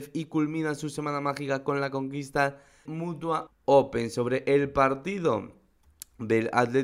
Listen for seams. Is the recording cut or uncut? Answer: cut